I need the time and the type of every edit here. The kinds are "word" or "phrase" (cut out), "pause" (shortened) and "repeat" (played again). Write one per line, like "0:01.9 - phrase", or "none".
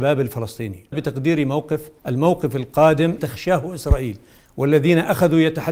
0:00.9 - word
0:02.0 - pause
0:03.2 - word